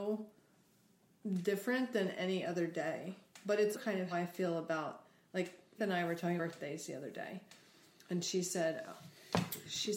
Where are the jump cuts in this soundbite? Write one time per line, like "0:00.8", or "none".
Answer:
0:03.7
0:04.1
0:05.8
0:06.4